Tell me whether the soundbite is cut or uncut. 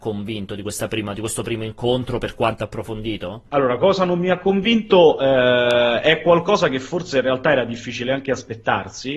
cut